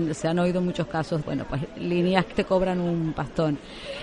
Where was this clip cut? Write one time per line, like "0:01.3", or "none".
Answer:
0:01.2
0:02.3